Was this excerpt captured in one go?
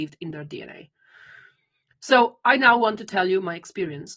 yes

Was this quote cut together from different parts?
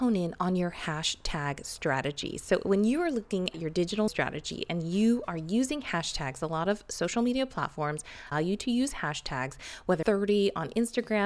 yes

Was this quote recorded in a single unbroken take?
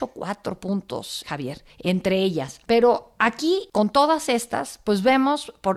yes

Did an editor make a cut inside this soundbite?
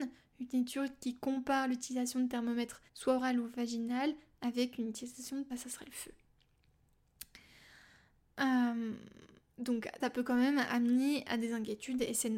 yes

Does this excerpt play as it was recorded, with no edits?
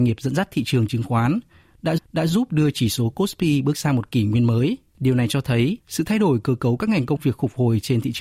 no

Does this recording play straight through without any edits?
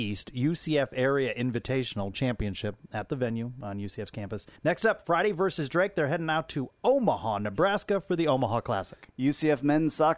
no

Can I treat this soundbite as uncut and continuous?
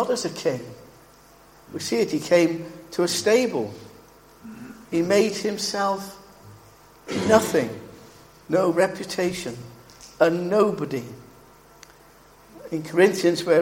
no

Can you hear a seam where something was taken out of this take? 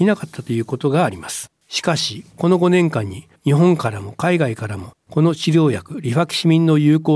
yes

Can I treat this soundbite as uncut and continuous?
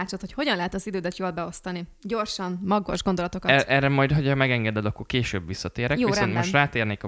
yes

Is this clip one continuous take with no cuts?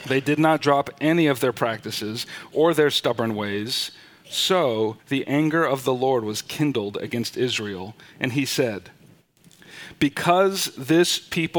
no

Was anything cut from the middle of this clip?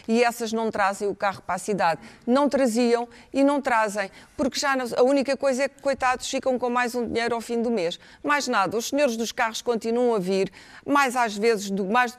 no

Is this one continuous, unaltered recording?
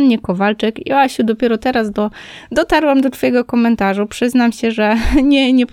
yes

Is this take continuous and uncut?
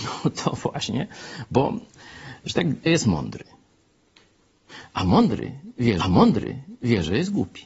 no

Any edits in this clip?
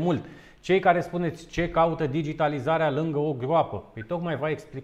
no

